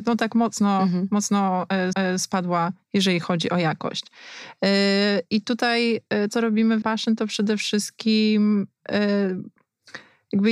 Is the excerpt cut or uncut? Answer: cut